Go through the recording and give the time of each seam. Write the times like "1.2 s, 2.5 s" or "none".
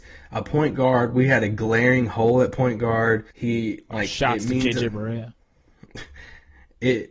3.3 s